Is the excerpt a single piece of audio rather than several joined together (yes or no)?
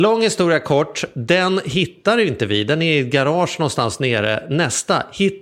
yes